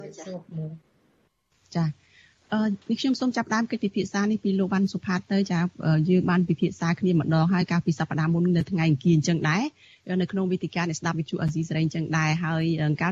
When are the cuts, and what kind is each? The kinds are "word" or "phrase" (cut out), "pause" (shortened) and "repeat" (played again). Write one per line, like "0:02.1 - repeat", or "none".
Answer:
0:02.8 - pause